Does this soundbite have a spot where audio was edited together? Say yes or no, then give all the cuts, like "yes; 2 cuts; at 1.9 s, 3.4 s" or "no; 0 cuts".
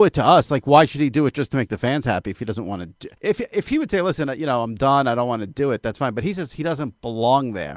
yes; 1 cut; at 3.2 s